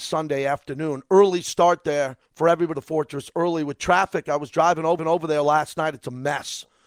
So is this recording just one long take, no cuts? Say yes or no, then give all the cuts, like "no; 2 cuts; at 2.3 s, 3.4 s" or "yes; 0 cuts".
no; 3 cuts; at 2.3 s, 2.7 s, 5.0 s